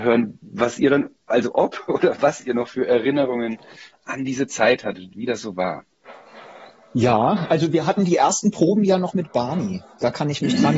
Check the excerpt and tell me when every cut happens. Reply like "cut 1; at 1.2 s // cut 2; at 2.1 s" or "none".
none